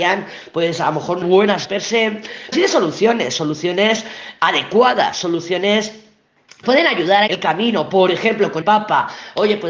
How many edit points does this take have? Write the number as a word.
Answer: six